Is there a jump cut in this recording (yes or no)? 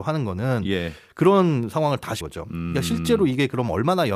yes